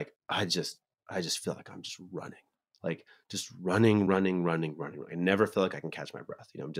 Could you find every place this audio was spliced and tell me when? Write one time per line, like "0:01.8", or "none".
none